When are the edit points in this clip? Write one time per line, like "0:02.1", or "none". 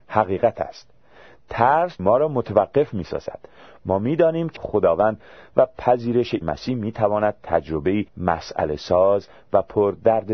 0:02.0
0:04.6
0:06.4
0:08.1